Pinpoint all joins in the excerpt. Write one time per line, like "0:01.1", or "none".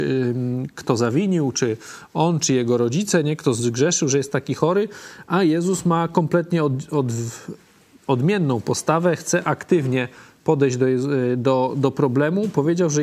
none